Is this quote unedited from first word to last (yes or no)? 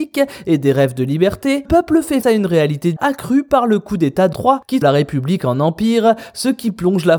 no